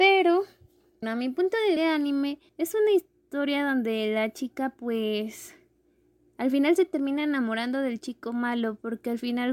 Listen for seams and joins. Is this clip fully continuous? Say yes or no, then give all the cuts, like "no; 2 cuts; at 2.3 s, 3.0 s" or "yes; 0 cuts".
no; 3 cuts; at 1.0 s, 1.8 s, 2.5 s